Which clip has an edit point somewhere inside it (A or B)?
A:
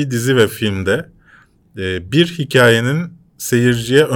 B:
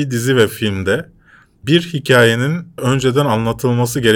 B